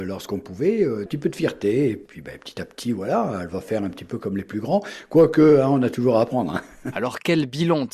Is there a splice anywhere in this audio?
no; 0 cuts

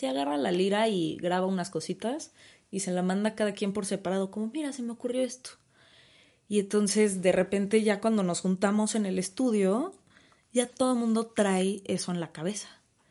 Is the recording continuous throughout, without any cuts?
yes; 0 cuts

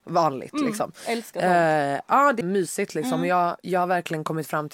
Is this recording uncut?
no; 1 cut; at 2.4 s

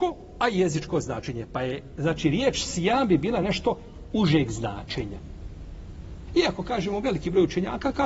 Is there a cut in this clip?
no; 0 cuts

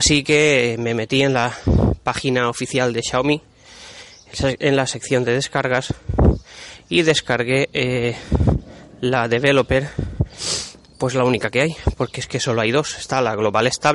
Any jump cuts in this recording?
no; 0 cuts

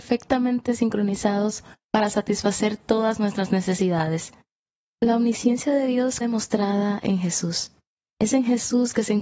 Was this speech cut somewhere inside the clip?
yes; 1 cut; at 6.2 s

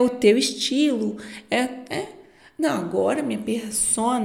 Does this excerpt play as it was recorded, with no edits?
yes; 0 cuts

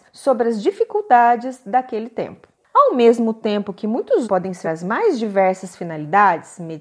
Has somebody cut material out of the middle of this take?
yes; 3 cuts; at 2.5 s, 4.2 s, 4.6 s

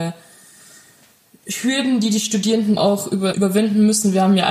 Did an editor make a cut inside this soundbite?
yes; 2 cuts; at 2.8 s, 3.3 s

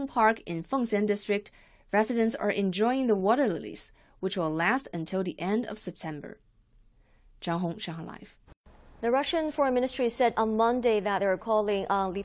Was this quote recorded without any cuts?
yes; 0 cuts

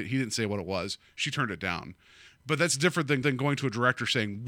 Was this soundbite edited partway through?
yes; 1 cut; at 3.2 s

